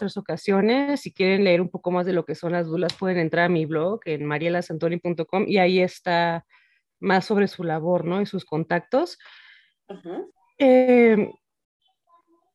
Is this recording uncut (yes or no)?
yes